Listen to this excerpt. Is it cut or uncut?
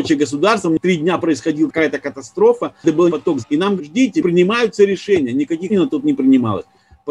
cut